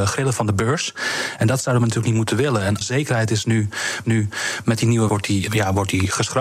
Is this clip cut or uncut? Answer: cut